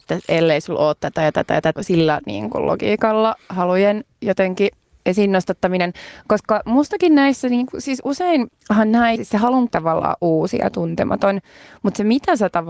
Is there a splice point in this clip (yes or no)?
yes